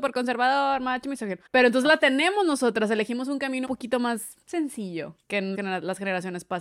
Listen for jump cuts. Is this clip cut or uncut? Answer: cut